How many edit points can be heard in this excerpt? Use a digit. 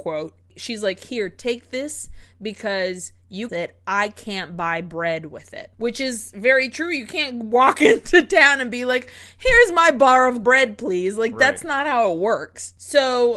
3